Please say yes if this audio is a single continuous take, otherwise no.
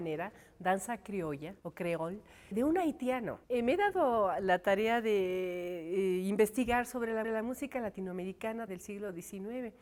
no